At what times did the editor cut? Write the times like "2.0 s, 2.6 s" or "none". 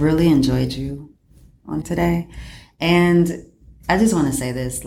1.8 s